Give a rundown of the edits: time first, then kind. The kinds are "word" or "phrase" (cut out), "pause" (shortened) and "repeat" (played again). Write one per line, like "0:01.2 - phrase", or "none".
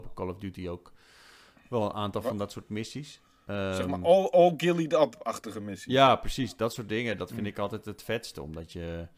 none